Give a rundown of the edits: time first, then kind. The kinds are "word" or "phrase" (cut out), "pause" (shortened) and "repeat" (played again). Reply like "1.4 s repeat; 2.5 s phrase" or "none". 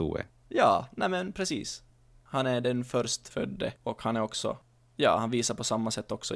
3.8 s pause